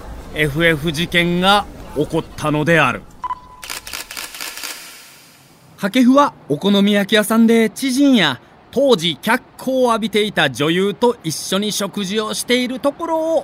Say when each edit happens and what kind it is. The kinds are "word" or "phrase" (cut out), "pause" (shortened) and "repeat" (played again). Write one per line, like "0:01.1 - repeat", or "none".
none